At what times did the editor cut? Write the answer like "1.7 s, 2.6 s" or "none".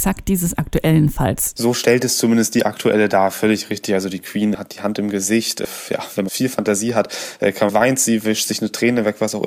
6.3 s, 7.7 s